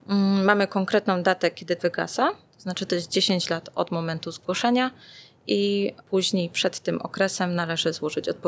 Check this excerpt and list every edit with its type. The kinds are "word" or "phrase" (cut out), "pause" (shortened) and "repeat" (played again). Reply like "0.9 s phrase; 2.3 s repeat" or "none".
1.8 s phrase; 6.0 s pause